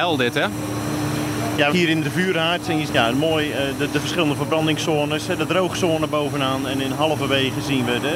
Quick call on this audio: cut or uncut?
cut